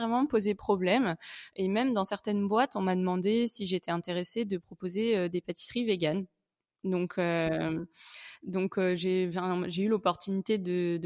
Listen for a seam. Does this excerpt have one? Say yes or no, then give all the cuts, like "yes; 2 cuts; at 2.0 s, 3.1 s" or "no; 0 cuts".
no; 0 cuts